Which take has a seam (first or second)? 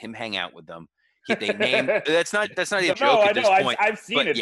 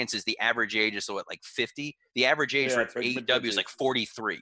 first